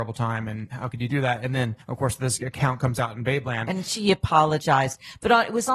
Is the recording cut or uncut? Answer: cut